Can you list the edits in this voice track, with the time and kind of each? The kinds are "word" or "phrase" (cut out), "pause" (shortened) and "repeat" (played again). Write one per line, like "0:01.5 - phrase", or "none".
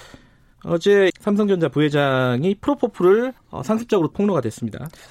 0:01.1 - word
0:03.4 - pause
0:04.1 - phrase